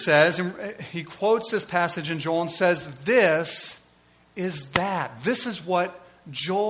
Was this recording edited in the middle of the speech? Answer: no; 0 cuts

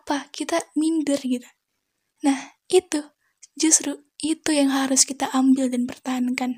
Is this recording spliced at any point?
no; 0 cuts

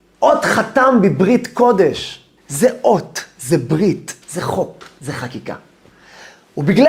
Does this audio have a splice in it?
yes; 2 cuts; at 2.4 s, 4.2 s

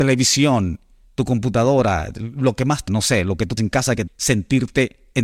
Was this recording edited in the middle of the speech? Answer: yes; 3 cuts; at 2.9 s, 3.6 s, 4.1 s

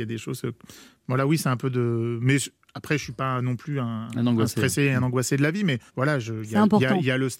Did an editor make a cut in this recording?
yes; 1 cut; at 5.9 s

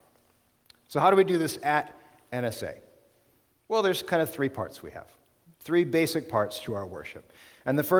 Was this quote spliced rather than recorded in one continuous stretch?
no; 0 cuts

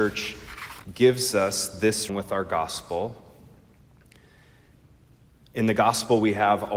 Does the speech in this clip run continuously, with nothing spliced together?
no; 1 cut; at 2.1 s

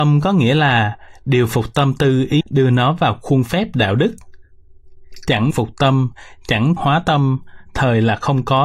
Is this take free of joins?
no; 3 cuts; at 2.4 s, 5.5 s, 6.8 s

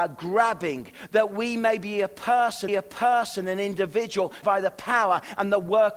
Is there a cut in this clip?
yes; 2 cuts; at 2.7 s, 4.4 s

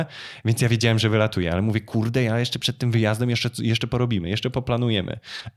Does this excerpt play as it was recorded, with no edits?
yes; 0 cuts

